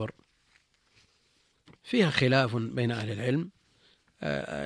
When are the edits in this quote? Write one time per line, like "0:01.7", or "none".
none

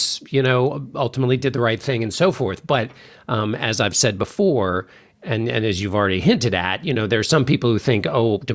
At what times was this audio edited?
none

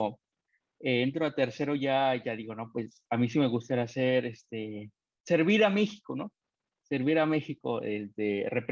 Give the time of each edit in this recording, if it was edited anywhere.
none

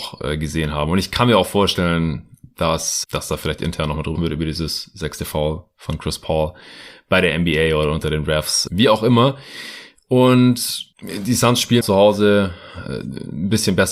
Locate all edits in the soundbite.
0:03.0
0:04.2
0:08.7
0:11.8

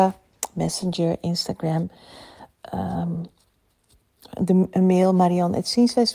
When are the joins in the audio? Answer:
none

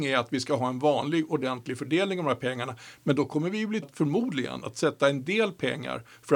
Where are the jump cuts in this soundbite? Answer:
0:03.8

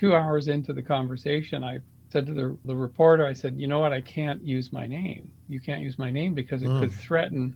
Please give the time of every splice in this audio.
none

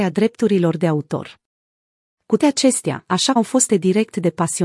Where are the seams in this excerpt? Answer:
0:02.4
0:03.4
0:03.7

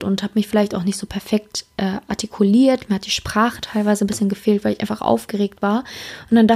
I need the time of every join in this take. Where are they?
none

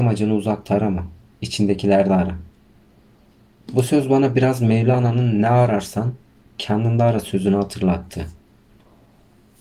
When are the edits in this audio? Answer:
none

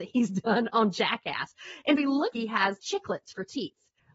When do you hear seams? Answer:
0:02.0
0:02.3
0:02.8

